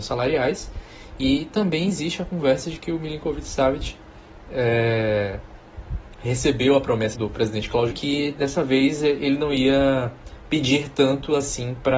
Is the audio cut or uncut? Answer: cut